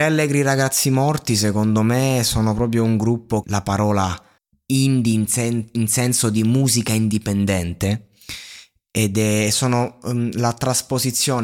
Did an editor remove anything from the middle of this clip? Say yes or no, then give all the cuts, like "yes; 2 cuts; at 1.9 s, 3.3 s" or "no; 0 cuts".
yes; 2 cuts; at 3.4 s, 4.4 s